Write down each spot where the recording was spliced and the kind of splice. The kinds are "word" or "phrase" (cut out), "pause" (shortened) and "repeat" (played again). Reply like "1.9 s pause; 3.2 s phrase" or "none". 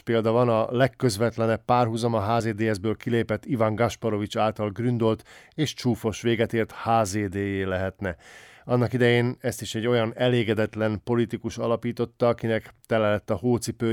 none